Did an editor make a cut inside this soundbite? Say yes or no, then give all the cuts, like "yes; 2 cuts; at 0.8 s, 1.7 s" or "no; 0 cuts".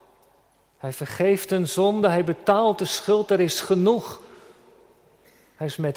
no; 0 cuts